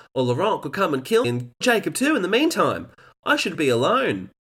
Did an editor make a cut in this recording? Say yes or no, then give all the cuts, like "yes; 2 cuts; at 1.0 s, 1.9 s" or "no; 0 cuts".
yes; 3 cuts; at 1.2 s, 1.6 s, 3.5 s